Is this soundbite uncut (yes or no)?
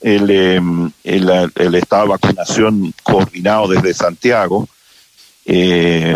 no